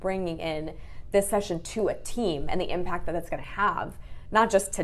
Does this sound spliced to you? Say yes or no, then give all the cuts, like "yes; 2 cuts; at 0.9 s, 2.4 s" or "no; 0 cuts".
no; 0 cuts